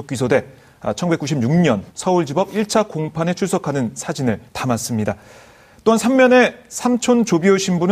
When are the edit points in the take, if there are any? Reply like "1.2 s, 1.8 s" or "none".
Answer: 1.9 s, 4.5 s